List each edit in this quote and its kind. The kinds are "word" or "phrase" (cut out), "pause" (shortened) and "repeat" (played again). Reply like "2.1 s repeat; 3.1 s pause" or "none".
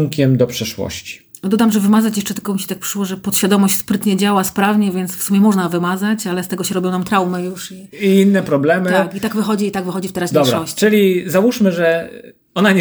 none